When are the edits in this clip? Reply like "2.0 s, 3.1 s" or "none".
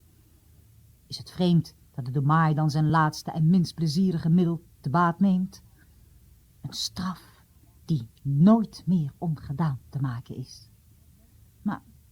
none